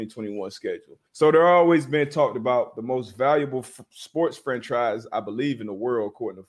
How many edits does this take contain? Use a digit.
1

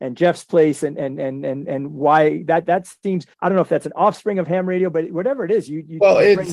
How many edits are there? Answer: 1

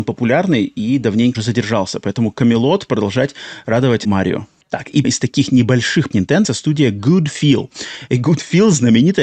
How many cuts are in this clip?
6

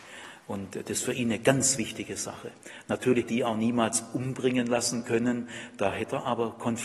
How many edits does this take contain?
1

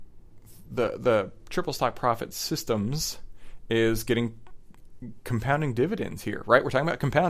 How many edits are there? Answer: 0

